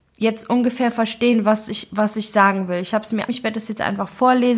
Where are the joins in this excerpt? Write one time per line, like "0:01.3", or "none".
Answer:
0:03.3